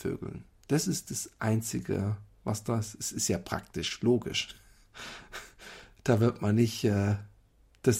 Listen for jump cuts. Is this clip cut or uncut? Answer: uncut